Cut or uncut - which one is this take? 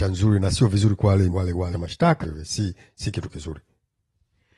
cut